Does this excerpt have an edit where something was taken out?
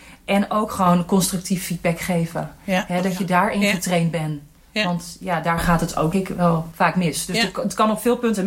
yes; 1 cut; at 6.1 s

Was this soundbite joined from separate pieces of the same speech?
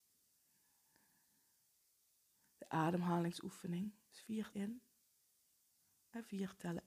yes; 1 cut; at 4.5 s

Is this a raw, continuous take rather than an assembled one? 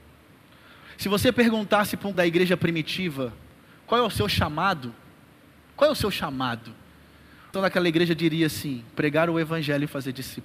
no; 2 cuts; at 2.1 s, 7.5 s

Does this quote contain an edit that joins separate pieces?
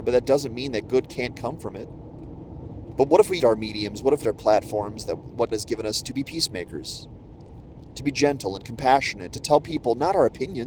yes; 5 cuts; at 3.4 s, 4.2 s, 5.5 s, 6.0 s, 9.3 s

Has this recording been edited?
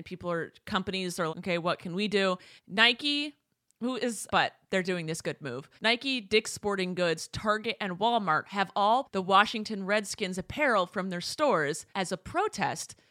yes; 6 cuts; at 1.3 s, 2.6 s, 4.3 s, 5.8 s, 9.0 s, 11.9 s

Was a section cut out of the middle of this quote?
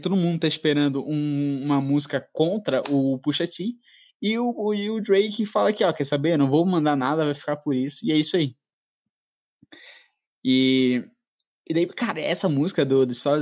no; 0 cuts

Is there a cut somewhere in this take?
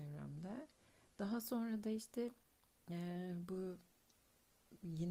no; 0 cuts

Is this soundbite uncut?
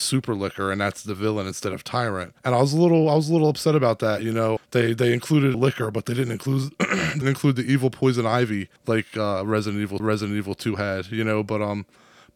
no; 6 cuts; at 2.4 s, 4.6 s, 5.5 s, 7.2 s, 8.8 s, 10.0 s

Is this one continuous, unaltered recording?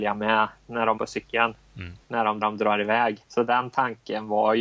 no; 4 cuts; at 1.0 s, 2.0 s, 2.4 s, 3.2 s

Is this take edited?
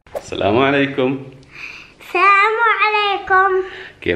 yes; 1 cut; at 1.9 s

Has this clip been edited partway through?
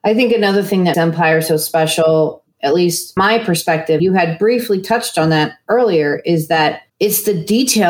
yes; 4 cuts; at 0.9 s, 3.2 s, 4.0 s, 6.9 s

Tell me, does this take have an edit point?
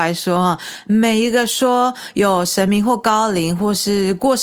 no; 0 cuts

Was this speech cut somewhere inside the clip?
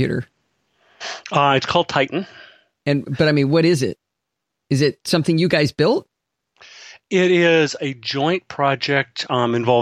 no; 0 cuts

